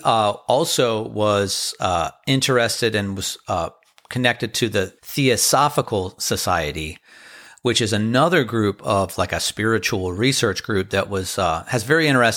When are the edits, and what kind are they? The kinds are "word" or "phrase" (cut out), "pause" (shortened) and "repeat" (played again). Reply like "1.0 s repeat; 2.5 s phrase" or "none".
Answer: 5.0 s pause